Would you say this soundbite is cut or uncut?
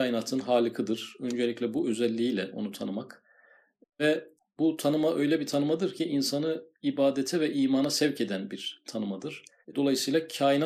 uncut